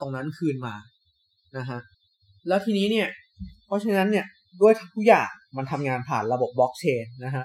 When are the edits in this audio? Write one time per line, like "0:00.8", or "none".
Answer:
0:01.9